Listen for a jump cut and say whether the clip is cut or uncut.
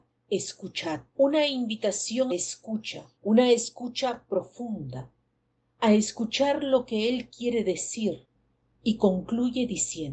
cut